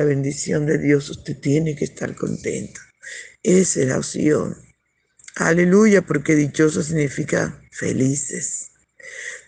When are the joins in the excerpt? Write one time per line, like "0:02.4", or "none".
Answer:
none

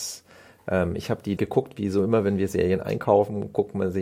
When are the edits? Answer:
0:01.4

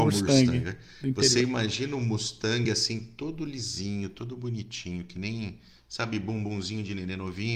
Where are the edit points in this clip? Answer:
none

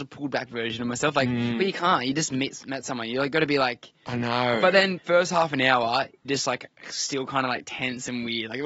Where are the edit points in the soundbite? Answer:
0:05.0
0:06.2

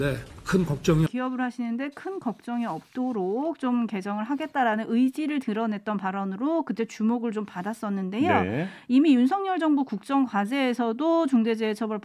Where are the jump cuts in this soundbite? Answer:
0:01.1

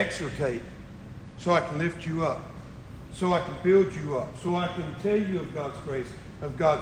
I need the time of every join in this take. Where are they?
none

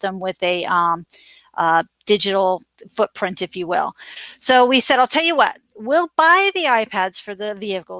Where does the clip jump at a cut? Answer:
none

